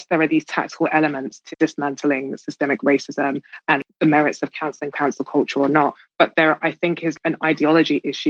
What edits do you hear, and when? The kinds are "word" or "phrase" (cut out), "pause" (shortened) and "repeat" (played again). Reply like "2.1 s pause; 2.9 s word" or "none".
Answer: 1.5 s word